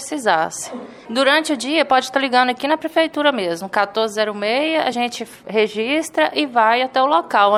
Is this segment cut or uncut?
uncut